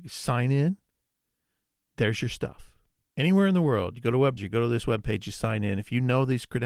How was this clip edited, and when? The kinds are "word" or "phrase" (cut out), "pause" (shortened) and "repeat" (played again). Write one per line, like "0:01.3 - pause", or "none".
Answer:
0:03.0 - word
0:04.4 - word